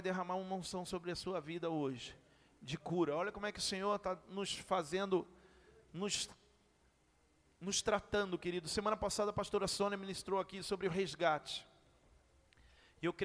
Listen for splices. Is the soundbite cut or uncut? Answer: uncut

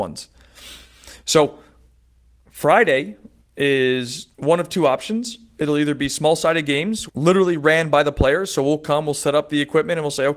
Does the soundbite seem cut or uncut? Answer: cut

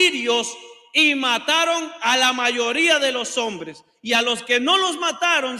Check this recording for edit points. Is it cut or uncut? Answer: uncut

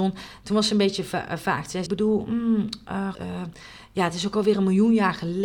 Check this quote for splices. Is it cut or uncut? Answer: cut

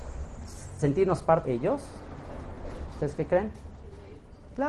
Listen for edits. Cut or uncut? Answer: cut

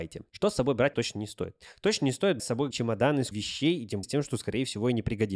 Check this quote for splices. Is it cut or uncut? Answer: cut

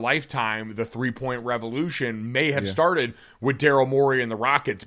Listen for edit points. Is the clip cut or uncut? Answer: uncut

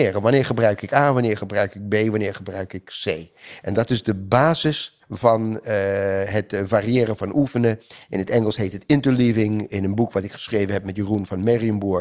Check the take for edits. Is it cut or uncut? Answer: cut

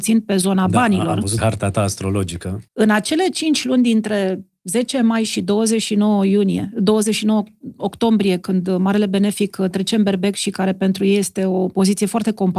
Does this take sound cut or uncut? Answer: cut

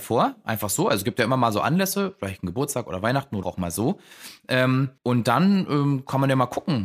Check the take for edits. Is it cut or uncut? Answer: cut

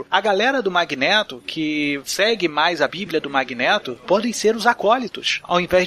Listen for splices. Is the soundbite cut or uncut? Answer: uncut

